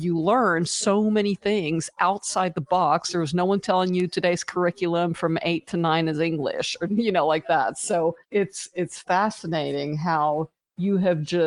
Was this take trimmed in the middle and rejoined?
yes; 1 cut; at 8.2 s

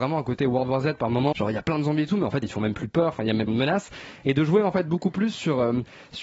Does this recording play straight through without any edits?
no; 3 cuts; at 1.3 s, 2.4 s, 3.5 s

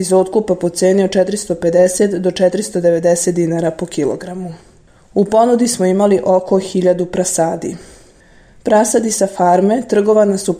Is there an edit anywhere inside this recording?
no; 0 cuts

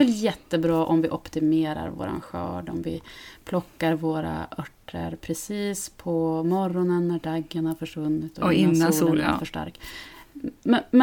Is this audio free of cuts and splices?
yes; 0 cuts

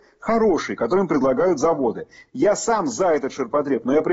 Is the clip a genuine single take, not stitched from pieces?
yes; 0 cuts

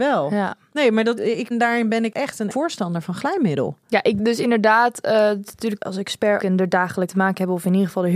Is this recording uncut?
no; 8 cuts; at 1.2 s, 1.5 s, 2.1 s, 2.5 s, 4.2 s, 5.8 s, 6.4 s, 7.1 s

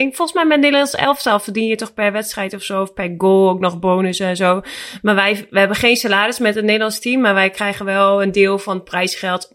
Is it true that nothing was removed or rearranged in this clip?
yes; 0 cuts

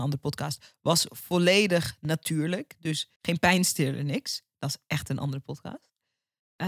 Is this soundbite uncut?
no; 1 cut; at 3.2 s

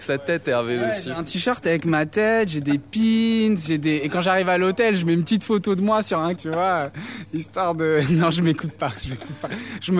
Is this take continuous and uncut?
no; 1 cut; at 6.4 s

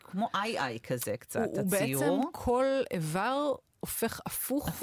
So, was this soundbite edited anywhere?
no; 0 cuts

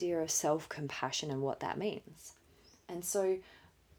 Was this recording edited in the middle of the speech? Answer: no; 0 cuts

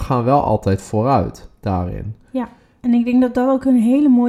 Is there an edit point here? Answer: no; 0 cuts

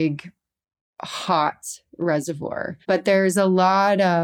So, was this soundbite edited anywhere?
yes; 1 cut; at 2.8 s

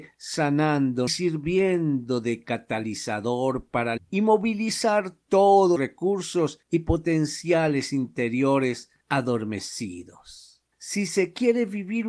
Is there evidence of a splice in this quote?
yes; 4 cuts; at 1.1 s, 4.0 s, 5.8 s, 10.7 s

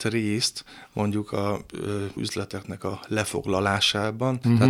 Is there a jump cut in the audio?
yes; 1 cut; at 2.2 s

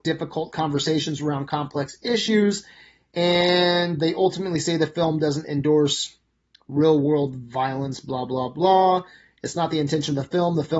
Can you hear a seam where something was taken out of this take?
no; 0 cuts

